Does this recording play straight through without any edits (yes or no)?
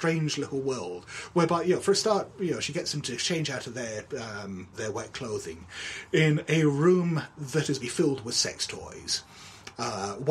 no